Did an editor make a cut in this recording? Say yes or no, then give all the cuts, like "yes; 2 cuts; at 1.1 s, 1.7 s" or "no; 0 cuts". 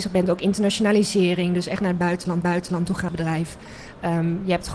yes; 2 cuts; at 2.4 s, 3.1 s